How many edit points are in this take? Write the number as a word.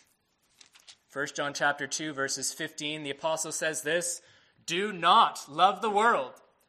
zero